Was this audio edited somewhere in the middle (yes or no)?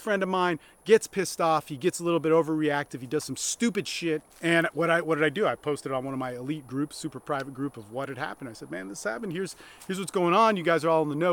yes